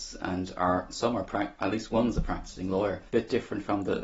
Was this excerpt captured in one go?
yes; 0 cuts

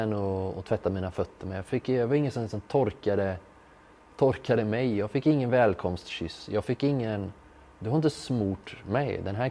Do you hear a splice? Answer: no; 0 cuts

